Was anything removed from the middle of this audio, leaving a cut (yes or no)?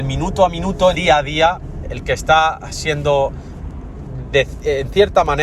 yes